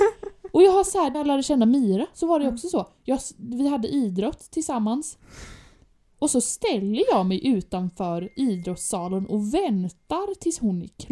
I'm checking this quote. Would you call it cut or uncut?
cut